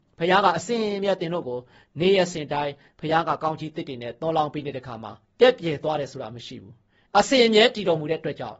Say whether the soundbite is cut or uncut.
cut